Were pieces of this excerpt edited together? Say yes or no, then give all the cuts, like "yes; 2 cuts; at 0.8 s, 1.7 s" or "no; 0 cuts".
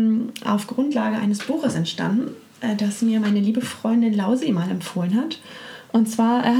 no; 0 cuts